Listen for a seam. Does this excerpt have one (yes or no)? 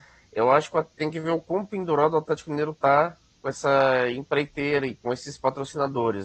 no